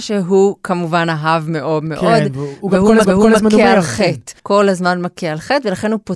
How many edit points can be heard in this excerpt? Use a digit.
2